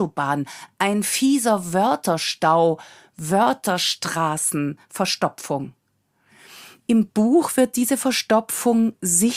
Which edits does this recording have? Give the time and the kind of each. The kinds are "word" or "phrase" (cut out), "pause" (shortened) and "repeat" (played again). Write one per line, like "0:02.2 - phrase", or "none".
none